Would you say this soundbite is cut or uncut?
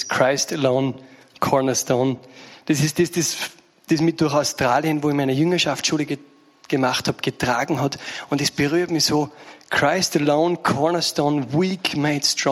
uncut